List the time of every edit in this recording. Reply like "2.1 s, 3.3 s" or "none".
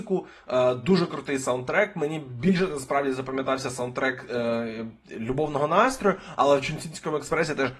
none